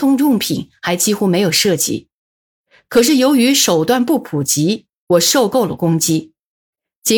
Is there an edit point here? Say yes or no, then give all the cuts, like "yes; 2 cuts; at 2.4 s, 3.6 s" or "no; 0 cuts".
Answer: no; 0 cuts